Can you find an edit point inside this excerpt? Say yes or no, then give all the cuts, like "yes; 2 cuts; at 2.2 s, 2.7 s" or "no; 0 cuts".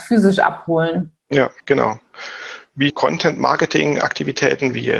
yes; 2 cuts; at 1.6 s, 2.9 s